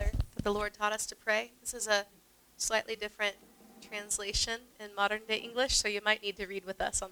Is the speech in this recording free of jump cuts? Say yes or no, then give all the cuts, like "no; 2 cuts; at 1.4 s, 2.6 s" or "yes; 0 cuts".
yes; 0 cuts